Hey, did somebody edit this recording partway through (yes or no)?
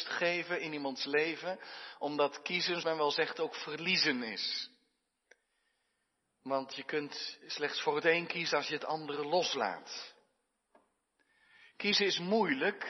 yes